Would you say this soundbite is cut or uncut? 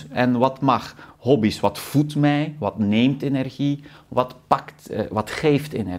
uncut